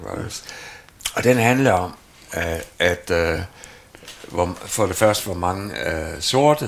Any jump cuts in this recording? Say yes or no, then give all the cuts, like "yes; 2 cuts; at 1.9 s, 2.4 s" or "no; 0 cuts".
no; 0 cuts